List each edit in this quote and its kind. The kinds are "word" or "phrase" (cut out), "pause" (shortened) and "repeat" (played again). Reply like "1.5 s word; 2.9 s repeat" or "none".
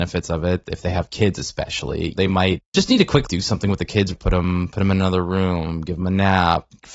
2.7 s pause

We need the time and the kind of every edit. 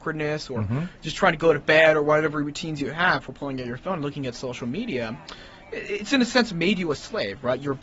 none

